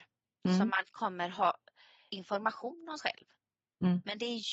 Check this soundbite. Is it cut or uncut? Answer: cut